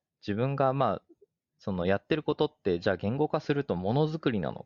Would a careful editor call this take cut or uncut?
uncut